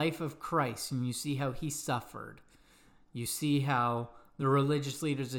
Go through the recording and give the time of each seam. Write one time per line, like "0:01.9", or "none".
none